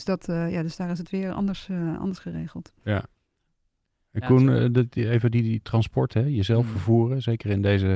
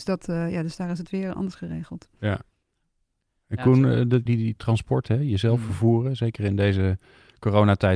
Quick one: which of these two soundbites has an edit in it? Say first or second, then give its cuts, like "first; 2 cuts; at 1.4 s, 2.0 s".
second; 2 cuts; at 1.3 s, 4.3 s